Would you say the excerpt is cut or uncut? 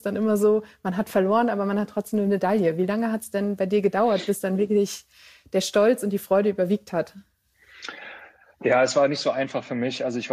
uncut